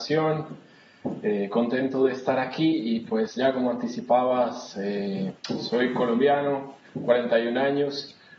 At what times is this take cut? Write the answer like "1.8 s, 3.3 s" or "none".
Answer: 5.4 s